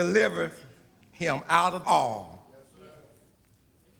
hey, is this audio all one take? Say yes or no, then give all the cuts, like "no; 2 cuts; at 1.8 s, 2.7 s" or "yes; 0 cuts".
no; 1 cut; at 1.8 s